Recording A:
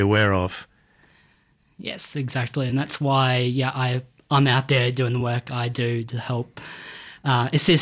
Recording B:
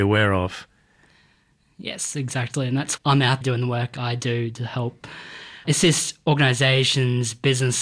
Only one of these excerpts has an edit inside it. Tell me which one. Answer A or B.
B